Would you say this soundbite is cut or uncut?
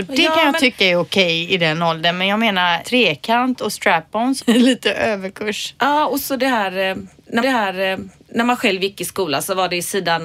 cut